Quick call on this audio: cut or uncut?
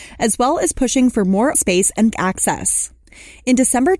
cut